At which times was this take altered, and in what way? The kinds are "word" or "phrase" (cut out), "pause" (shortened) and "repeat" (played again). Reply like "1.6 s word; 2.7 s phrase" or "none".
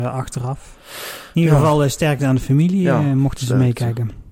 none